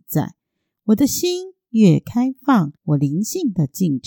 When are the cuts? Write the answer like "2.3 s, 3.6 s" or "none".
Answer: 2.8 s